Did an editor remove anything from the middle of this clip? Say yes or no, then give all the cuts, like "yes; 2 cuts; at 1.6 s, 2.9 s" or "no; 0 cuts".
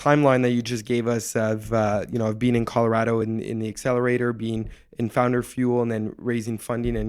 no; 0 cuts